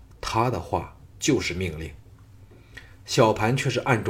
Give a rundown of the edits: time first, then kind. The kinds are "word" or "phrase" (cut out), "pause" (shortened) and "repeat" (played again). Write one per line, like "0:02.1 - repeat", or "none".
0:01.1 - pause